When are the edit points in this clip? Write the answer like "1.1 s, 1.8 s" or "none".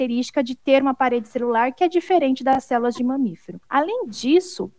3.6 s

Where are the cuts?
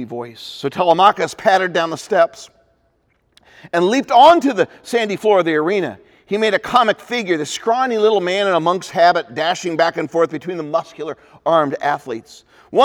none

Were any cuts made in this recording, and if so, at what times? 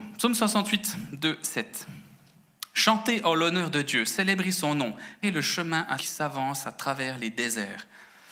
5.2 s, 6.0 s

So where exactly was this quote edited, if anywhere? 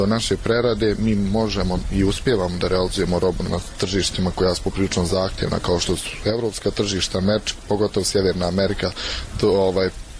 3.4 s

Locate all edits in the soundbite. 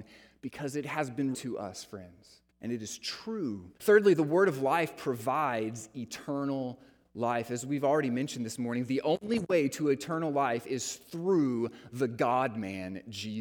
1.3 s, 2.5 s, 3.8 s

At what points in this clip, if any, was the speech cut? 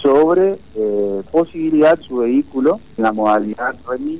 1.3 s, 2.0 s, 3.0 s

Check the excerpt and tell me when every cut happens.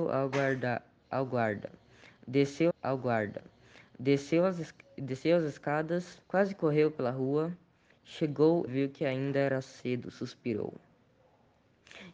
2.7 s, 6.2 s, 8.7 s

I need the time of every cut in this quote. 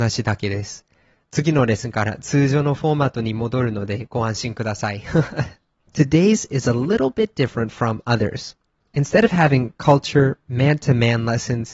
6.5 s

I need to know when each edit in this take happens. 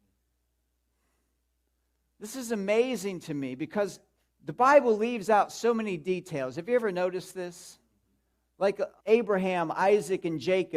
4.2 s, 9.0 s

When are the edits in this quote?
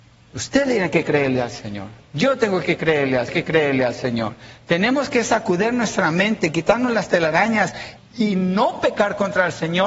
3.3 s, 8.0 s

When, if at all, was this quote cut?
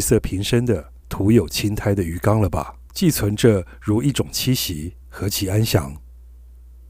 1.0 s, 2.9 s, 5.0 s

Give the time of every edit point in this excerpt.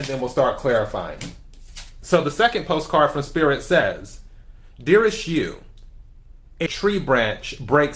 6.7 s

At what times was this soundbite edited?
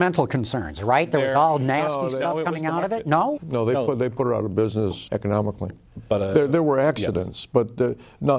3.4 s, 5.1 s

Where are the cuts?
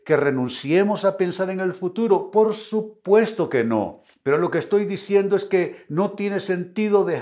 4.1 s

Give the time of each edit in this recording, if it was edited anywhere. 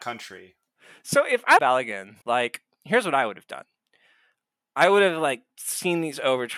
1.6 s, 2.2 s

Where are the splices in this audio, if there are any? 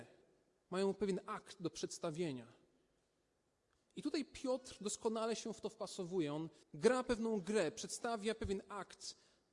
6.6 s

